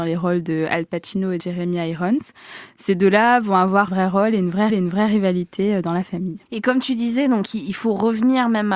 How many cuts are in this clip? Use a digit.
4